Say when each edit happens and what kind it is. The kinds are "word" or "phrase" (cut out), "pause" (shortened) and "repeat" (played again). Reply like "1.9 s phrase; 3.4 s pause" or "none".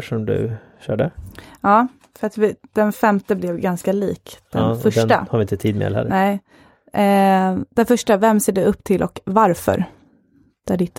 2.0 s pause; 7.7 s pause